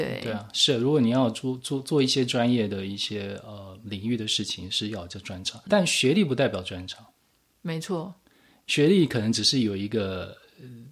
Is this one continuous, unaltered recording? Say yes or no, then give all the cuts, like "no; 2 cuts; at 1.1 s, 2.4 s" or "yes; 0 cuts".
no; 1 cut; at 5.7 s